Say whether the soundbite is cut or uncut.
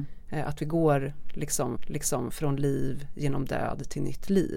cut